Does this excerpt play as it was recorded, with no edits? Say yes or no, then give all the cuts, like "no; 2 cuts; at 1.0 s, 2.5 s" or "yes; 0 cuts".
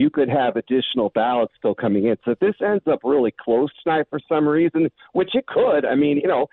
yes; 0 cuts